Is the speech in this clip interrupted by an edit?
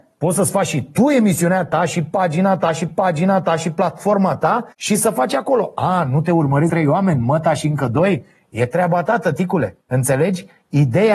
yes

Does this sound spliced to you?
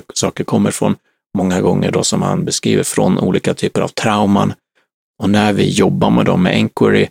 no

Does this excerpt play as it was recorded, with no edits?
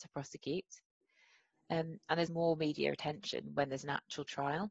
no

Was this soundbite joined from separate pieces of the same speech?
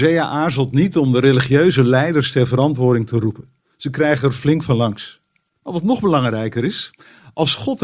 yes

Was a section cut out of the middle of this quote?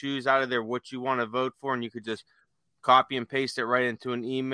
no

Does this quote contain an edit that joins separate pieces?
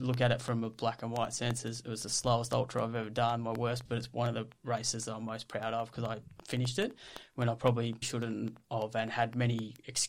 yes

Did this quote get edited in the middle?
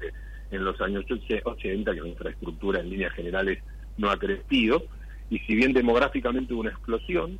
no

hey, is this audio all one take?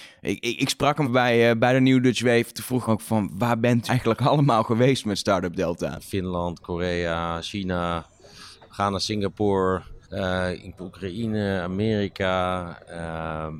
no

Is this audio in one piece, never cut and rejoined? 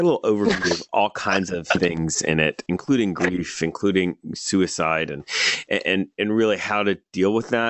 yes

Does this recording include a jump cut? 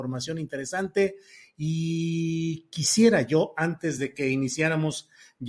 no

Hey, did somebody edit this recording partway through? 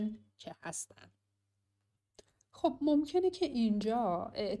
no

